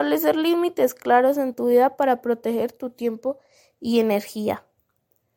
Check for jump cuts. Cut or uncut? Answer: cut